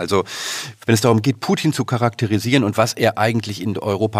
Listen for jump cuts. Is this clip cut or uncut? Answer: uncut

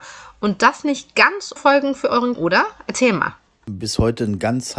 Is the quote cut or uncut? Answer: cut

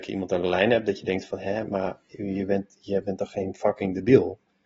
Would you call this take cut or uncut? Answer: uncut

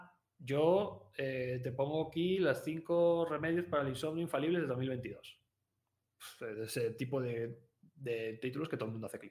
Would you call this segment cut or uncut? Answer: uncut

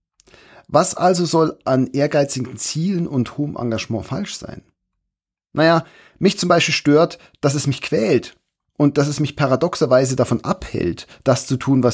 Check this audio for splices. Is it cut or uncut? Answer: uncut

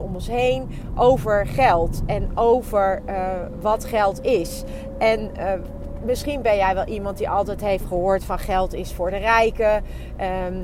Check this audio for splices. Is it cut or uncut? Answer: uncut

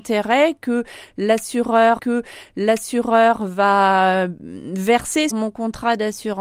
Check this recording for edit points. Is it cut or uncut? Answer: cut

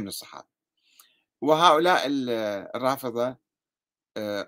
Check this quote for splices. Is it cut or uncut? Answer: uncut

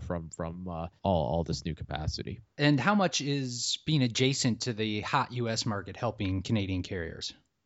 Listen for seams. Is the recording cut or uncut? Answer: cut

